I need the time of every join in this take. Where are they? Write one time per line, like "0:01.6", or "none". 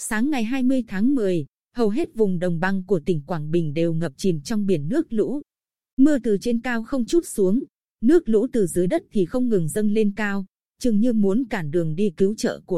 0:07.1